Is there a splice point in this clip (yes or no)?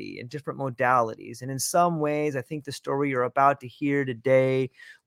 no